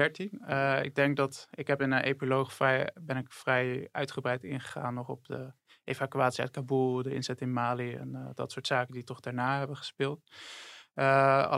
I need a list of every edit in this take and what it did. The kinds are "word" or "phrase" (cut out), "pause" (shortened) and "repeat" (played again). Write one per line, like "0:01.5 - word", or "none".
none